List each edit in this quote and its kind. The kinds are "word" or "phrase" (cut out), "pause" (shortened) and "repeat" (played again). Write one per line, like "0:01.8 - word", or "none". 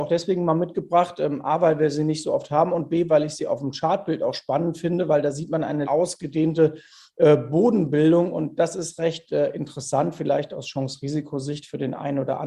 0:05.8 - word